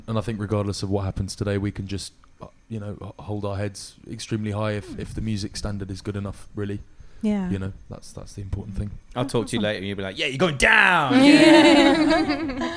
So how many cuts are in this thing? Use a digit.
1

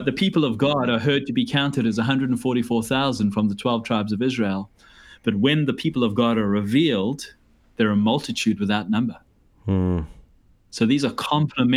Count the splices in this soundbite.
0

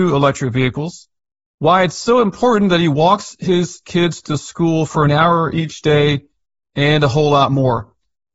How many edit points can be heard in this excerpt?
0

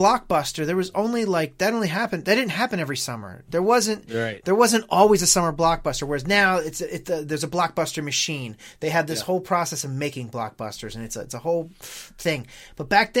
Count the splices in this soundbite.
0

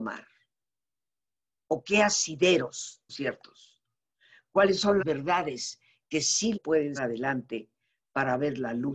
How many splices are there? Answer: 4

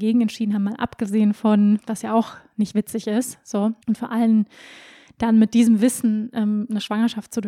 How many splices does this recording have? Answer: 2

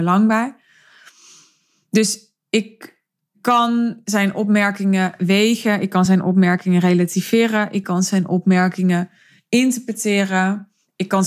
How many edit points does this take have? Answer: 0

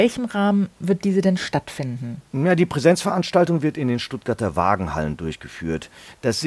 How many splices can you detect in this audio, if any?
1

